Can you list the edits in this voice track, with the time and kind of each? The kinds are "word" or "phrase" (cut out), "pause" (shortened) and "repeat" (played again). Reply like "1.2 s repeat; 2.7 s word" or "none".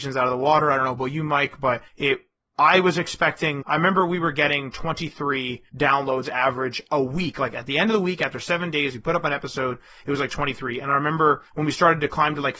1.9 s pause; 3.6 s word; 5.7 s pause; 11.5 s pause

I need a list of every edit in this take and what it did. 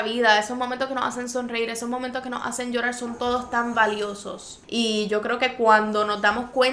4.6 s pause

